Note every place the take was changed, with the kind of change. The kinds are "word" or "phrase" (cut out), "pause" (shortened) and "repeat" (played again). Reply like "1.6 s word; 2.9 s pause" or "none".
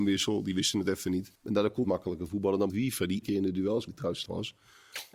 1.4 s pause; 1.8 s phrase; 2.7 s word; 3.2 s word; 3.9 s word; 4.3 s word